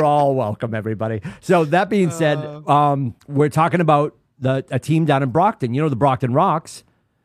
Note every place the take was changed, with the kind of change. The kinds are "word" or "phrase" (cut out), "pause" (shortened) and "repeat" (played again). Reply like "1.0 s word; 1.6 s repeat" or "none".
3.2 s pause